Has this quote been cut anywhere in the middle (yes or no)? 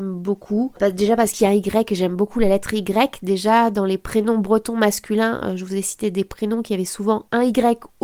no